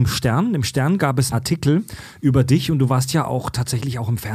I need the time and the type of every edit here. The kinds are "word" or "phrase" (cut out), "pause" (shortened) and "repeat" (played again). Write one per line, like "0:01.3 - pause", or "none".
0:01.3 - word